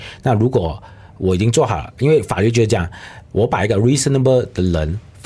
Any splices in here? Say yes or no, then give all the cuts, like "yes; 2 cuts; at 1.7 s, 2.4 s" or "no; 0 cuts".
no; 0 cuts